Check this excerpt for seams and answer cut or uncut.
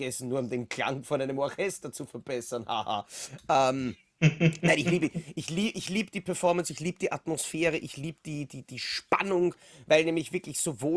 uncut